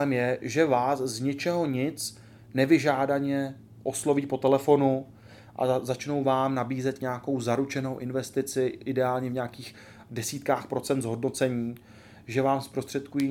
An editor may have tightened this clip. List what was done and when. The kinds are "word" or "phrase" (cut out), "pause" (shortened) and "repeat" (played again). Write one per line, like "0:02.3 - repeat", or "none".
none